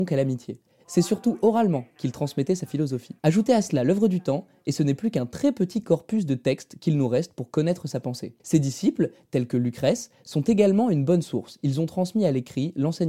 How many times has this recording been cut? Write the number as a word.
two